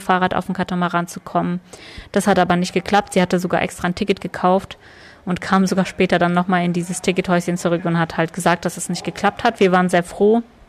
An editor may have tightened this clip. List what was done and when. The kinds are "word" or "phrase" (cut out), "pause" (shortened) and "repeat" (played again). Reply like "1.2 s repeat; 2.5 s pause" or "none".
none